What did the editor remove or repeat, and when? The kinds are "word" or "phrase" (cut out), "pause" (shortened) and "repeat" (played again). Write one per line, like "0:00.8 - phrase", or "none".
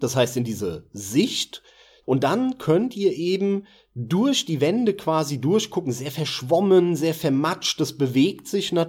none